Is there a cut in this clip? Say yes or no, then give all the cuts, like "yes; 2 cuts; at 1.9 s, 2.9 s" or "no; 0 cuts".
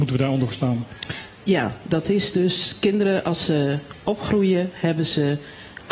no; 0 cuts